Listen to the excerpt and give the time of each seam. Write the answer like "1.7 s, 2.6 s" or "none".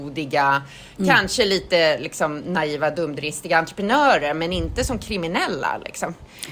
none